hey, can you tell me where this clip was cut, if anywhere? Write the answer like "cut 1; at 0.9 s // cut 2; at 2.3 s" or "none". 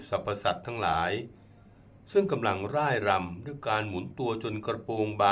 none